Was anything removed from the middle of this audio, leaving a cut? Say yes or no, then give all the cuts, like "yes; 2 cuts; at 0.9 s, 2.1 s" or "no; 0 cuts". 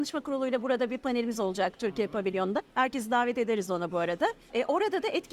no; 0 cuts